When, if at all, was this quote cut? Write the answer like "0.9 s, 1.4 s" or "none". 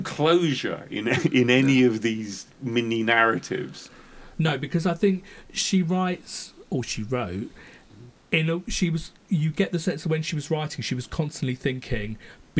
none

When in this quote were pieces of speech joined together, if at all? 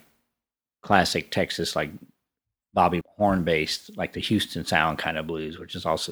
3.0 s

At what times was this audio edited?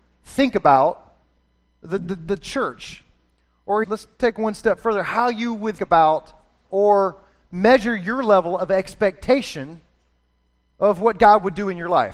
3.8 s, 5.8 s, 6.6 s

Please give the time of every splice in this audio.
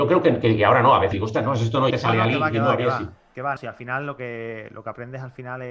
1.1 s, 1.9 s, 3.6 s

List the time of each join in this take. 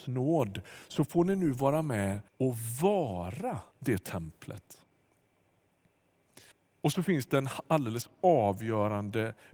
2.3 s, 3.7 s, 6.5 s

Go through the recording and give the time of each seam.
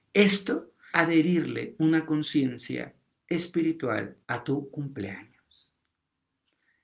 0.9 s, 4.2 s

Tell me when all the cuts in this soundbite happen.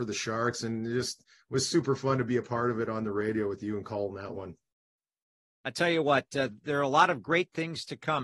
none

